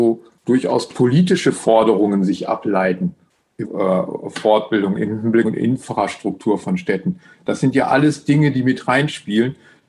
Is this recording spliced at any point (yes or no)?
yes